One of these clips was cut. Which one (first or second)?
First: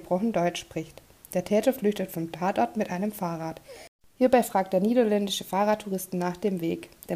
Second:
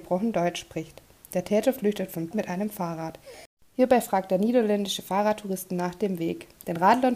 second